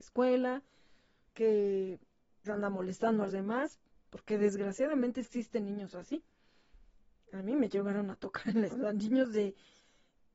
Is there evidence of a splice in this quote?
yes; 4 cuts; at 2.4 s, 3.3 s, 5.2 s, 8.7 s

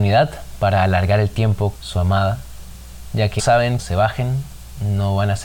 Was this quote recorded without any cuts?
no; 3 cuts; at 1.7 s, 3.4 s, 3.8 s

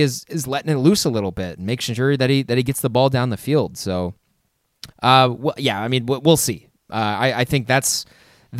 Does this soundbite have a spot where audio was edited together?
yes; 1 cut; at 4.9 s

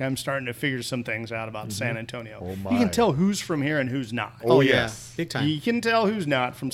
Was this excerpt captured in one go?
yes; 0 cuts

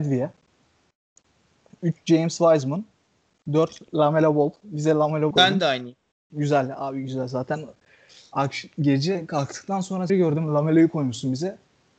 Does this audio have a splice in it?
yes; 3 cuts; at 5.3 s, 6.1 s, 10.1 s

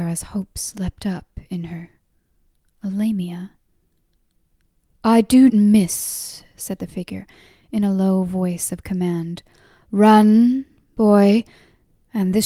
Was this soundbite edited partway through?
yes; 1 cut; at 5.5 s

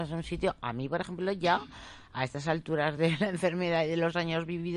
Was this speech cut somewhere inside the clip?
no; 0 cuts

